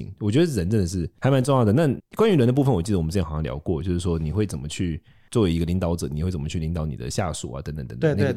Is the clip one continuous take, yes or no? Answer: yes